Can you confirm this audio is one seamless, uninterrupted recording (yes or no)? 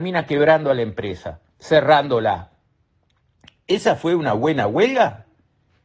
no